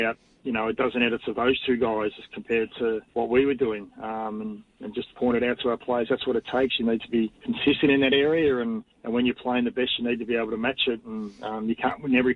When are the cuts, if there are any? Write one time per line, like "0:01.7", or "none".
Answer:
0:03.1
0:07.4
0:08.9

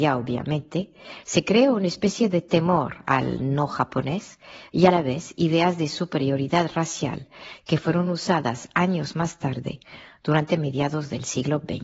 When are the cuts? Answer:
none

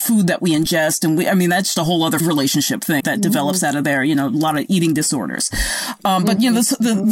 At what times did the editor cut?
0:01.8
0:02.2
0:03.0

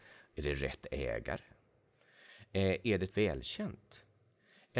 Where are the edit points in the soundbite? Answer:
0:03.1

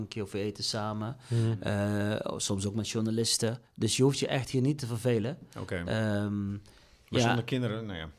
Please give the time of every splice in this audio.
0:03.7

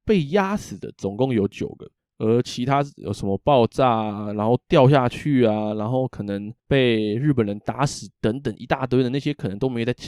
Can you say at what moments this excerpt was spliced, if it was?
0:02.0
0:06.6

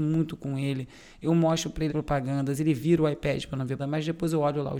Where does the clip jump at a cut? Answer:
0:01.9
0:03.8

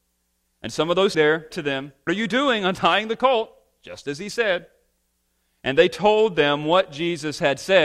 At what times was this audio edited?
0:01.1
0:01.5
0:02.1

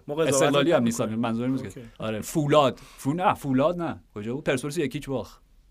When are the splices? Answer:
0:01.9
0:04.1

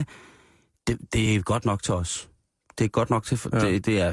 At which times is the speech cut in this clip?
none

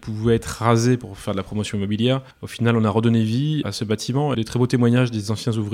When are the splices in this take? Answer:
0:02.3
0:03.6
0:04.3

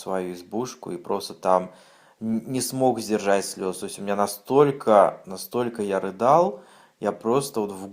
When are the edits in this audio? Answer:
none

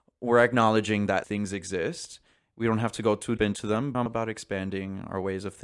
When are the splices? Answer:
0:01.2
0:03.4
0:04.1

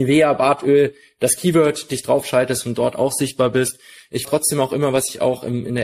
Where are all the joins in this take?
0:04.2

